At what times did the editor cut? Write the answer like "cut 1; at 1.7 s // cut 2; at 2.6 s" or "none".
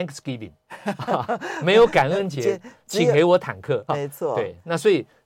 cut 1; at 3.9 s